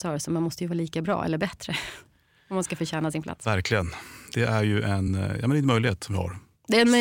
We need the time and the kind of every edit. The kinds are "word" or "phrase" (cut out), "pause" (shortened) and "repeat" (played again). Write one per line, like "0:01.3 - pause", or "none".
none